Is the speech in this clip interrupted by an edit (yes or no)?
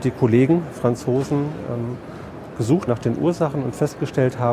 yes